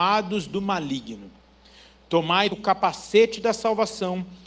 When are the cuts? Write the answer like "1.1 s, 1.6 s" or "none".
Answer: 2.5 s